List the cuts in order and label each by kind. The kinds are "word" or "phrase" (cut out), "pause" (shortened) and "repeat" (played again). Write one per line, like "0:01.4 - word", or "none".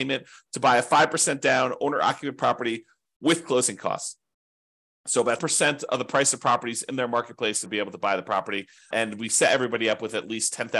0:05.4 - word
0:07.7 - word
0:08.9 - word